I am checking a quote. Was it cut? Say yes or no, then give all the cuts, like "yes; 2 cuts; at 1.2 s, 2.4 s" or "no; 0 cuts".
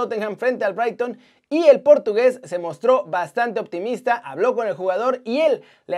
no; 0 cuts